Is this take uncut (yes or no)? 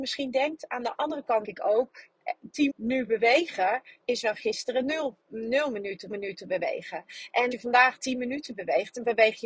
no